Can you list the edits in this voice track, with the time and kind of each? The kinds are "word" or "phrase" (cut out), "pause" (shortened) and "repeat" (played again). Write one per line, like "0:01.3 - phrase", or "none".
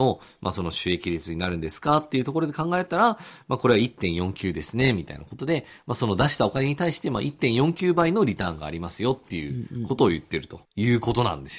0:10.7 - pause